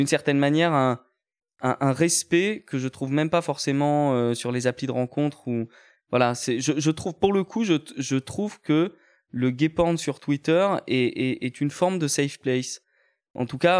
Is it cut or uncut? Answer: uncut